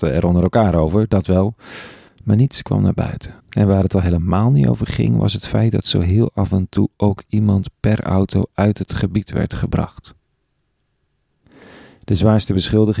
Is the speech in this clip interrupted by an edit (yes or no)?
yes